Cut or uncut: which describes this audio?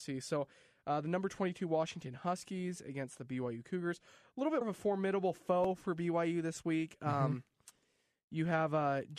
cut